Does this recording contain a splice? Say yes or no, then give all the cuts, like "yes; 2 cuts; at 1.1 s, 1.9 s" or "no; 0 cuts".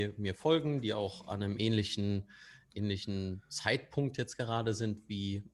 no; 0 cuts